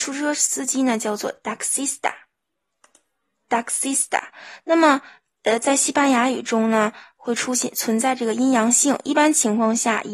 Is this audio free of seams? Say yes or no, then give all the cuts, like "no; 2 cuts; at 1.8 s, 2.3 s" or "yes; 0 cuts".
yes; 0 cuts